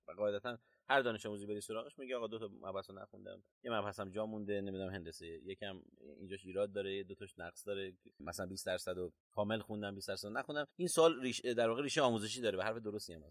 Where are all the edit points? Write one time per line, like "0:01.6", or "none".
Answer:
0:03.5
0:08.1
0:09.2
0:10.7